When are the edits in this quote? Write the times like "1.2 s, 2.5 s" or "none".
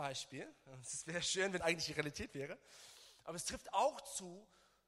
1.6 s